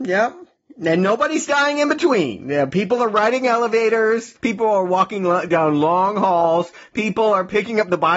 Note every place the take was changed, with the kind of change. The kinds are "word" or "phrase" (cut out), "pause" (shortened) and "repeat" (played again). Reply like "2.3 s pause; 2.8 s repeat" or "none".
none